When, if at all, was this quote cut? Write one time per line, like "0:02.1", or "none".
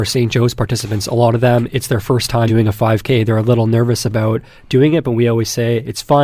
0:02.5